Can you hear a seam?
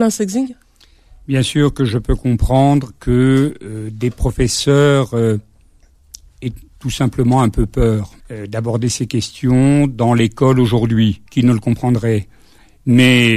yes; 2 cuts; at 8.2 s, 11.3 s

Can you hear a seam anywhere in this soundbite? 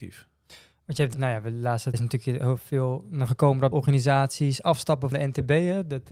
yes; 5 cuts; at 1.1 s, 1.9 s, 3.3 s, 3.7 s, 5.1 s

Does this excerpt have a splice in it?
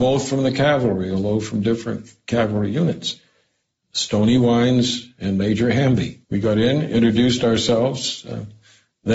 yes; 1 cut; at 6.2 s

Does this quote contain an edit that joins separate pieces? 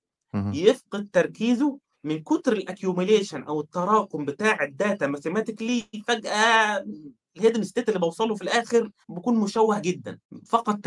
yes; 2 cuts; at 1.9 s, 9.0 s

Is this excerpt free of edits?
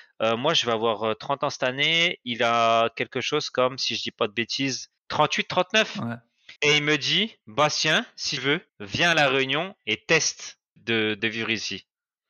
no; 7 cuts; at 5.0 s, 6.6 s, 7.4 s, 8.4 s, 8.7 s, 10.8 s, 11.2 s

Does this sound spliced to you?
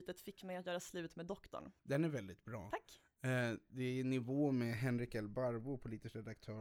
yes; 1 cut; at 1.8 s

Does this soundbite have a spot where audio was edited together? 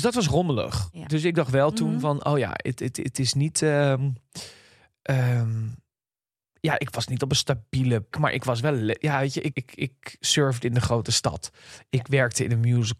yes; 2 cuts; at 8.1 s, 9.5 s

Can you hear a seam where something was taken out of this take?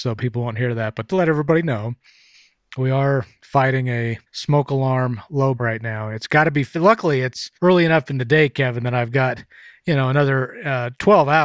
yes; 4 cuts; at 1.1 s, 4.3 s, 5.6 s, 7.5 s

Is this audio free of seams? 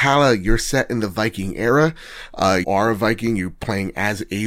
no; 1 cut; at 2.6 s

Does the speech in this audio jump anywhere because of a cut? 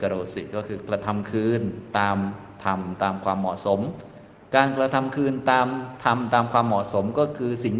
no; 0 cuts

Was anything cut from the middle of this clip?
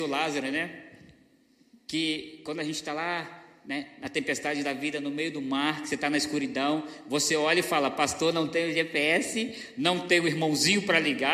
no; 0 cuts

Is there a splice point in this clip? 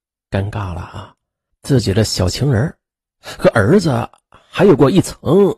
yes; 1 cut; at 1.5 s

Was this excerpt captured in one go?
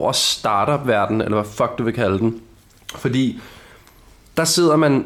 yes; 0 cuts

